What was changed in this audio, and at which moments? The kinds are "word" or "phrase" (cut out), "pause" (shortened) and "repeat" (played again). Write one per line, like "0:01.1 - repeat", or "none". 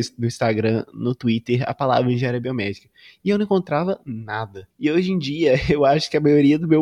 none